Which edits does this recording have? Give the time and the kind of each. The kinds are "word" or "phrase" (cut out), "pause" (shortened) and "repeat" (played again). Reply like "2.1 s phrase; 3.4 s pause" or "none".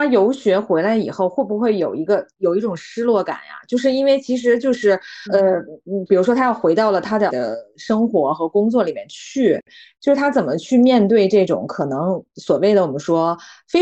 5.3 s word; 7.3 s word